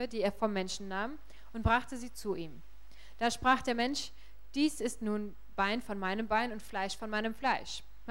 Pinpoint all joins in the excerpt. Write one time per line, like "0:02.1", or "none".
none